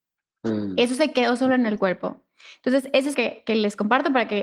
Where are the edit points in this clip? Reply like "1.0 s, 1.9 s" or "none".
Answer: 3.1 s